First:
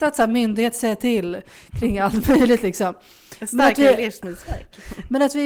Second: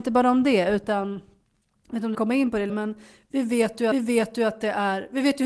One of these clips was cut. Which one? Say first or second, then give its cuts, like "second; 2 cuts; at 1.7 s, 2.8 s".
second; 3 cuts; at 2.1 s, 2.7 s, 3.9 s